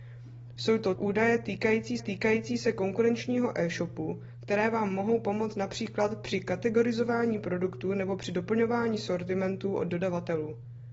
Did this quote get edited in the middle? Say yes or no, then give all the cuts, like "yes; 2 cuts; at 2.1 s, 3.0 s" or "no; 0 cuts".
yes; 3 cuts; at 0.9 s, 2.0 s, 9.9 s